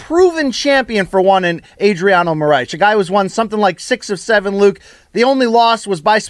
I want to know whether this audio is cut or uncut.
uncut